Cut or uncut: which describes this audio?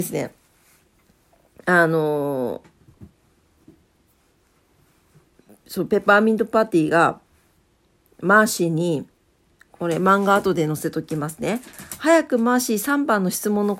uncut